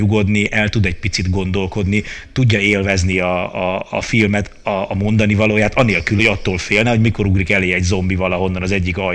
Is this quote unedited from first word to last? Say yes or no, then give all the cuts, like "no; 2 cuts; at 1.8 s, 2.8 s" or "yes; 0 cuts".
yes; 0 cuts